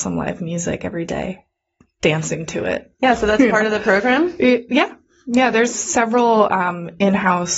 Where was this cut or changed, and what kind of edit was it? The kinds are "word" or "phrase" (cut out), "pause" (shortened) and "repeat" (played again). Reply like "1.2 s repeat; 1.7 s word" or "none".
none